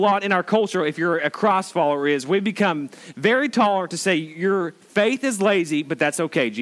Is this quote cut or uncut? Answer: uncut